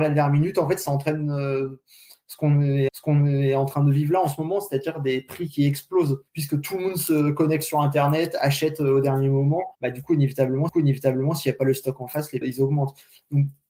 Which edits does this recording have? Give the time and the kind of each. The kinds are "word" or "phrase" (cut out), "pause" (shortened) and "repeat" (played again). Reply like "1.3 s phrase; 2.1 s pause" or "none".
2.9 s repeat; 6.3 s pause; 9.7 s pause; 10.7 s repeat; 12.4 s word